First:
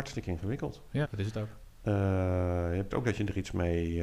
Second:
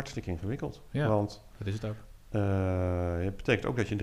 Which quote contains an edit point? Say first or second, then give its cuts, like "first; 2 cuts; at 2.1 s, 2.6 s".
first; 2 cuts; at 1.0 s, 2.9 s